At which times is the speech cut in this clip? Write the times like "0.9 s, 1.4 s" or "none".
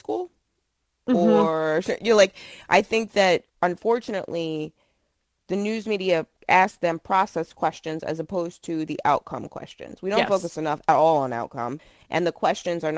3.5 s